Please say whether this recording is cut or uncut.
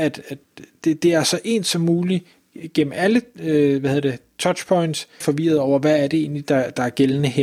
cut